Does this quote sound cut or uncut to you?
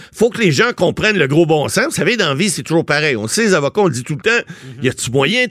uncut